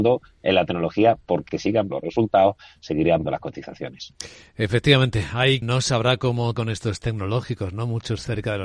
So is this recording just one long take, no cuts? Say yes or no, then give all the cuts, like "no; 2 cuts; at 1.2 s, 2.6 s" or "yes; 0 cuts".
no; 6 cuts; at 1.5 s, 1.9 s, 3.2 s, 5.6 s, 6.5 s, 7.0 s